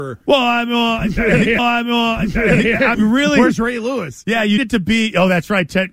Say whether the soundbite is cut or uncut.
cut